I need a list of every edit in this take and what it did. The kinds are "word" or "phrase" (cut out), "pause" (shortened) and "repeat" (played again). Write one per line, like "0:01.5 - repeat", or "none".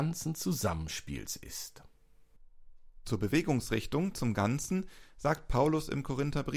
none